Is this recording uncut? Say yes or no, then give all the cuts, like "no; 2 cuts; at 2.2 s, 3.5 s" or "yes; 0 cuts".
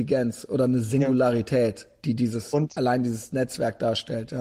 yes; 0 cuts